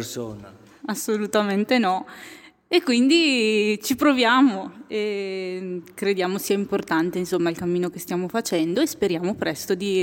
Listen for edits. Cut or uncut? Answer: uncut